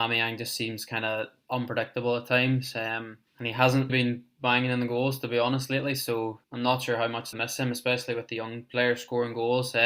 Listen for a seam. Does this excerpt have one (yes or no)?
yes